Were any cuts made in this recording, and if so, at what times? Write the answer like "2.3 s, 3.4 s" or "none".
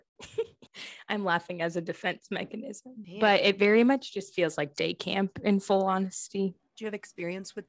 none